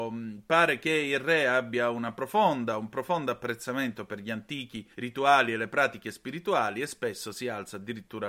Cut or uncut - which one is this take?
cut